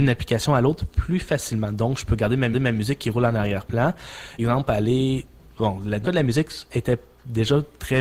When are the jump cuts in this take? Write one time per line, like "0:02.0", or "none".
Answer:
0:02.5
0:04.4
0:06.0